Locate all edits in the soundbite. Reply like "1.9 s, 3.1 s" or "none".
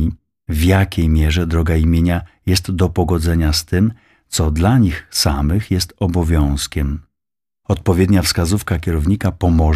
none